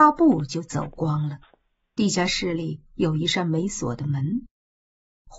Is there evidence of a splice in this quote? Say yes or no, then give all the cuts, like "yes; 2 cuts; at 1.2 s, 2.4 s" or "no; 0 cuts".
no; 0 cuts